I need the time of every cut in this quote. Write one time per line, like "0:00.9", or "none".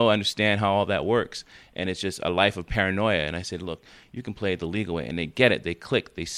none

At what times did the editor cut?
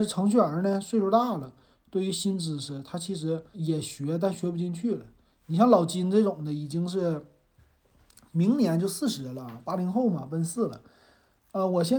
0:03.5

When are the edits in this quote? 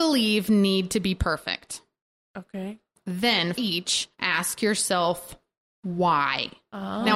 0:03.5
0:04.1

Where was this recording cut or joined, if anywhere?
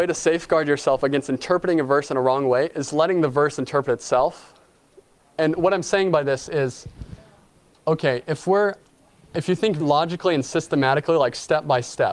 0:09.8

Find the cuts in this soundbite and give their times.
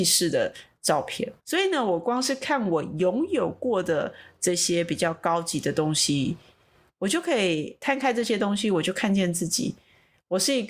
0:01.4

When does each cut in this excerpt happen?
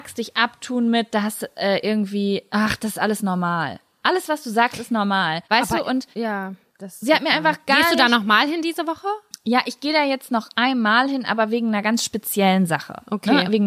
0:05.4
0:06.1

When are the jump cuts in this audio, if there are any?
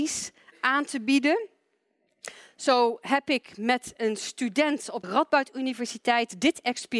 0:05.0

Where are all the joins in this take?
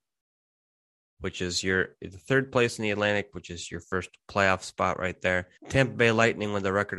0:04.2
0:05.6

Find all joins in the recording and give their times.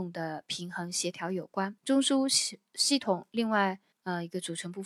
0:01.8
0:03.9

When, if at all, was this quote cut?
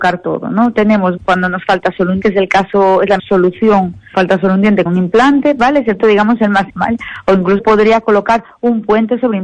0:01.2
0:02.2
0:03.2
0:04.1
0:04.9
0:06.0
0:06.7
0:07.6

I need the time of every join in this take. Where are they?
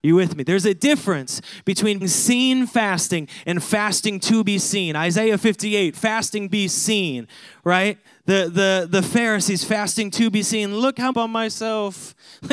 0:02.0
0:06.5
0:08.0
0:11.1

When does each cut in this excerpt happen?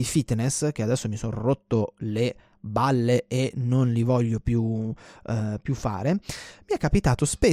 none

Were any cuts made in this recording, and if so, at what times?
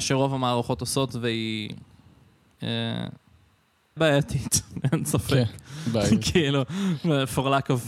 0:04.0

